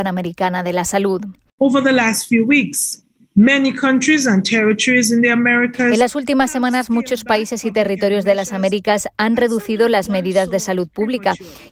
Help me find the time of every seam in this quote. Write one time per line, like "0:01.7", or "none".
none